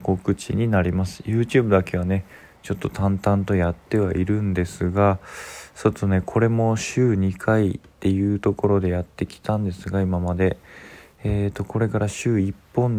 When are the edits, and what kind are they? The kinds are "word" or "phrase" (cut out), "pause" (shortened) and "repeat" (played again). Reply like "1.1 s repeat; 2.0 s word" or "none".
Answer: none